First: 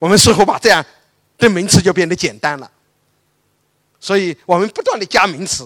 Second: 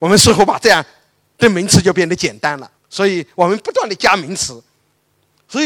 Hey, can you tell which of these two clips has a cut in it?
second; 1 cut; at 2.8 s

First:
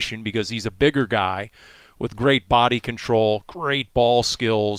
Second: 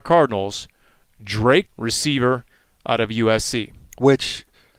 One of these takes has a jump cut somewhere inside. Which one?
second; 1 cut; at 1.6 s

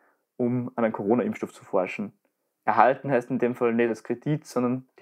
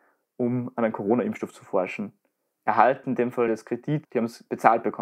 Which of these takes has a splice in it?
second; 3 cuts; at 3.0 s, 3.5 s, 4.0 s

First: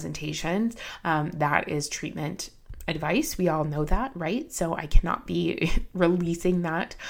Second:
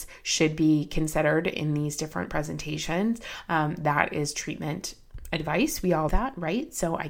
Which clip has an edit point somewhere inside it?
second; 1 cut; at 6.1 s

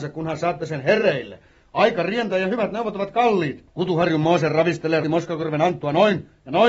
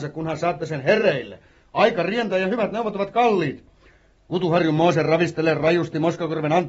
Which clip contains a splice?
first; 2 cuts; at 3.7 s, 5.0 s

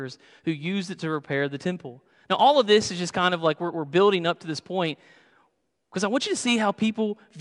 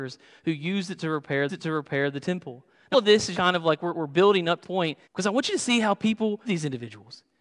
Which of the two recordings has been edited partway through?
second; 6 cuts; at 1.5 s, 2.9 s, 3.3 s, 4.6 s, 5.0 s, 6.4 s

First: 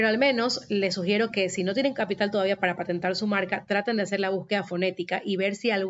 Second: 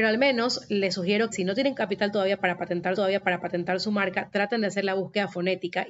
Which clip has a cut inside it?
second; 2 cuts; at 1.3 s, 3.0 s

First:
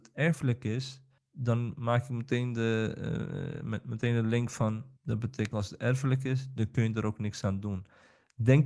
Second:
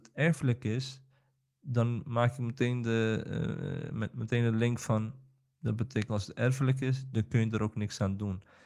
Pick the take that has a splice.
first; 2 cuts; at 1.2 s, 5.0 s

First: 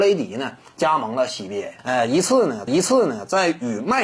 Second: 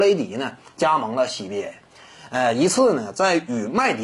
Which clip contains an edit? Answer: first; 2 cuts; at 1.8 s, 2.7 s

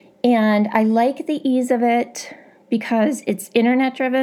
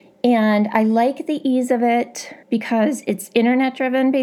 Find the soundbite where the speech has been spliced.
second; 1 cut; at 2.4 s

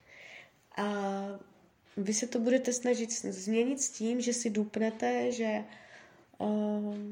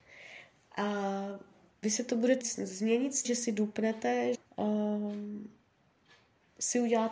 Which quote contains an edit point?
second; 4 cuts; at 1.8 s, 2.4 s, 3.2 s, 4.3 s

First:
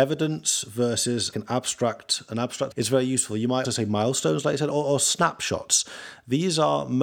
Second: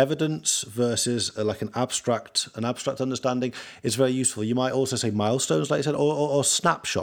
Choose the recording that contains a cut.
first; 4 cuts; at 1.3 s, 2.7 s, 3.6 s, 4.7 s

